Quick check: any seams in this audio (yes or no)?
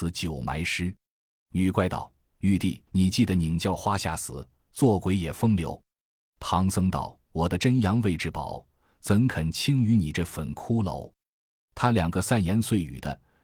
yes